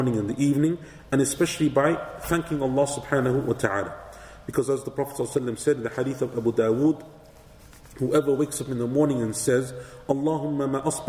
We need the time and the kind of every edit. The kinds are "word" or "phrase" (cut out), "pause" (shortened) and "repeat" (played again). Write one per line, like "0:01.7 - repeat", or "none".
none